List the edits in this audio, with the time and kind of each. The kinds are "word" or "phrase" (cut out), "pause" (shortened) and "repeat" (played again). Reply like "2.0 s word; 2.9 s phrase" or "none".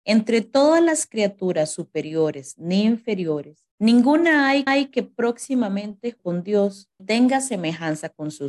3.7 s pause; 4.7 s repeat; 6.2 s word; 7.0 s word